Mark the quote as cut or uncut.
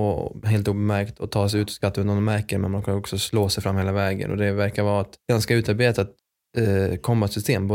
cut